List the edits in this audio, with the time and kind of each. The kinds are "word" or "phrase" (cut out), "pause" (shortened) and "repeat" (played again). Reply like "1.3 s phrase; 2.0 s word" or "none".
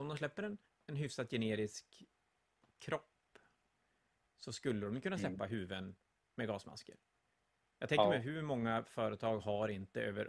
none